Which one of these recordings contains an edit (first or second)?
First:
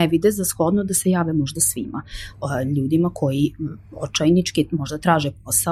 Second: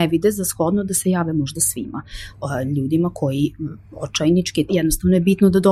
second